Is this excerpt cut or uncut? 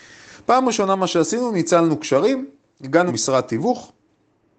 cut